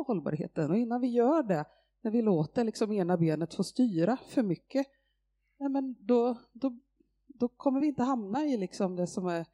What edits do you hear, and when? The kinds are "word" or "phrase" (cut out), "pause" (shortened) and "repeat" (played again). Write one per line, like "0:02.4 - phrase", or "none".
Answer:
none